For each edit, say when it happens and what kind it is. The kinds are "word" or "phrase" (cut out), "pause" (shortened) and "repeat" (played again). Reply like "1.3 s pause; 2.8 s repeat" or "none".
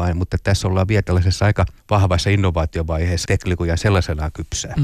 1.8 s pause; 3.3 s word